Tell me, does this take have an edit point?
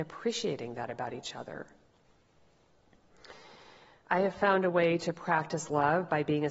no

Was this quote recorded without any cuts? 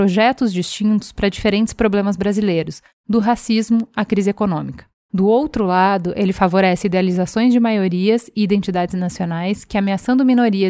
yes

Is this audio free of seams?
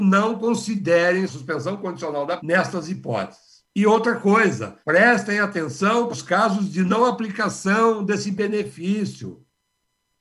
no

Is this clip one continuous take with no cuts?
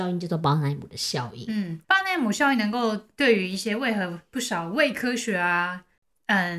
no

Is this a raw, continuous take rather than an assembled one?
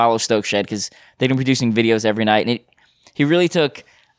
yes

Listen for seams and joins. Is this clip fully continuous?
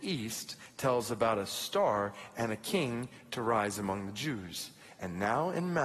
yes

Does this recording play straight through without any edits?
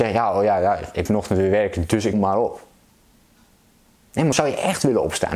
no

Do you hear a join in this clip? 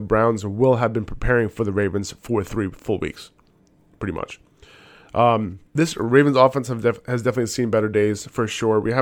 yes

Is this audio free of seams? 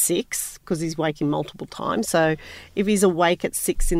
yes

